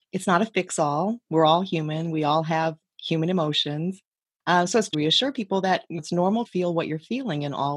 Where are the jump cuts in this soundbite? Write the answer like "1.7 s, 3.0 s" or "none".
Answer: 4.9 s, 6.0 s, 6.4 s